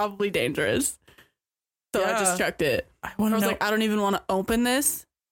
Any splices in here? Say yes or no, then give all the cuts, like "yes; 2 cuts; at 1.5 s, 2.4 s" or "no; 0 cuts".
no; 0 cuts